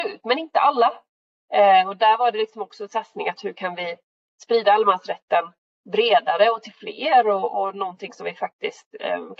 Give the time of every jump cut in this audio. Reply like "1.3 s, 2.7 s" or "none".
none